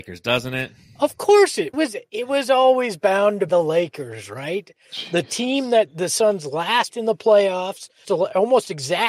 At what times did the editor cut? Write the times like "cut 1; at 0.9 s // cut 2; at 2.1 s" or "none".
cut 1; at 1.7 s // cut 2; at 3.5 s // cut 3; at 6.9 s // cut 4; at 8.0 s